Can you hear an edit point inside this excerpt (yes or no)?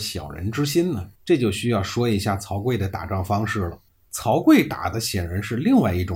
yes